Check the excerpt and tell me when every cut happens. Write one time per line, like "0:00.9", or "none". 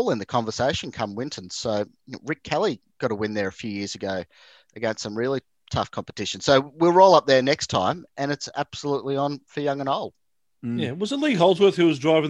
none